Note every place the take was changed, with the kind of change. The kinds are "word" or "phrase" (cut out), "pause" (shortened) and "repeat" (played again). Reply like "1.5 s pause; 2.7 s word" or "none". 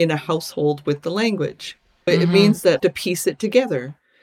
2.1 s word; 2.8 s phrase